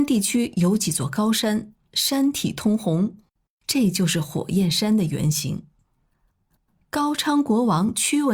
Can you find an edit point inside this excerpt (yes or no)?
no